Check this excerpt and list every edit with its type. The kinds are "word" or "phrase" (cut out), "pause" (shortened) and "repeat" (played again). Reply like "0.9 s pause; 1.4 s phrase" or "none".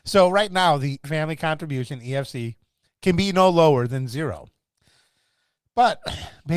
1.0 s word